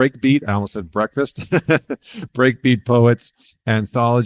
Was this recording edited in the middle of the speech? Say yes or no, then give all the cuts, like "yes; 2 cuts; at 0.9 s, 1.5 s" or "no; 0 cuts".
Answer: no; 0 cuts